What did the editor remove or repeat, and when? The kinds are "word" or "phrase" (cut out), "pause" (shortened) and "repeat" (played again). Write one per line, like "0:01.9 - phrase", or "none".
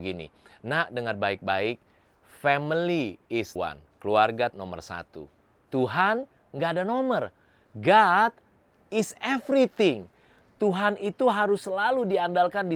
0:03.6 - word
0:04.5 - word